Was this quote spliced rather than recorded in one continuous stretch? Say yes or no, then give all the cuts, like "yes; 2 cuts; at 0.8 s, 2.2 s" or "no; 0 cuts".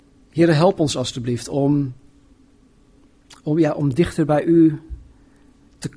no; 0 cuts